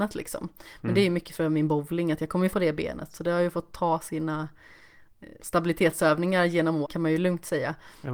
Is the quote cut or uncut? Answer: cut